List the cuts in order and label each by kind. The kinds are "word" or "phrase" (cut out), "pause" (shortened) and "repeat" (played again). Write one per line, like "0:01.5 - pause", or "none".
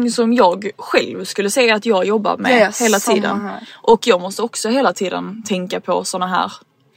none